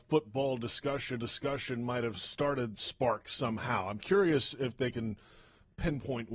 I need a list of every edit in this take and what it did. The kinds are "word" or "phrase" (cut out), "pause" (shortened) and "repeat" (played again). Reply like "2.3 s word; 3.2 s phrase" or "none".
1.2 s repeat; 2.7 s word